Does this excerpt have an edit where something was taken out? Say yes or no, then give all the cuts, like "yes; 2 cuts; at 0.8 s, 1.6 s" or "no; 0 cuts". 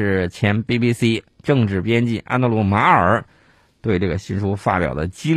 no; 0 cuts